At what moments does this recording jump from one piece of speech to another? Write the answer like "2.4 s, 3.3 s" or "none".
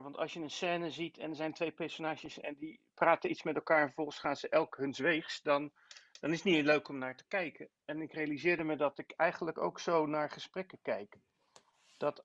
none

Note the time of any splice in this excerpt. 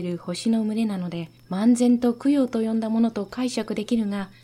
1.4 s

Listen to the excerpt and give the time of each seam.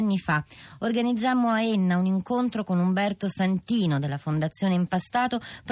none

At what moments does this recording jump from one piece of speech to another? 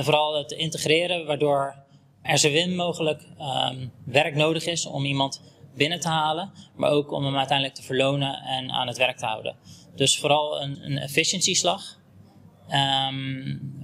2.2 s, 10.7 s

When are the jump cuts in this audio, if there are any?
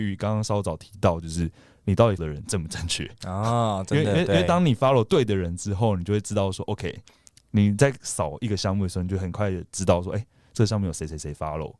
2.2 s

